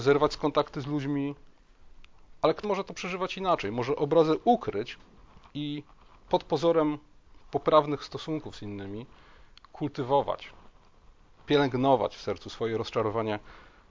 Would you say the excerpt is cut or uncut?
cut